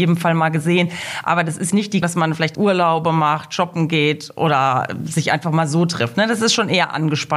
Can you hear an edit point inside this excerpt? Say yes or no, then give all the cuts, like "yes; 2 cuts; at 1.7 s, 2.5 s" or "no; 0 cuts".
yes; 3 cuts; at 1.7 s, 2.0 s, 2.5 s